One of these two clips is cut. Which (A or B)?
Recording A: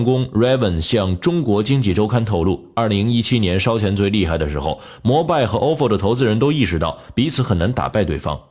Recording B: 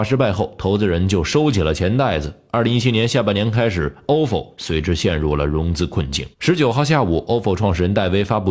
B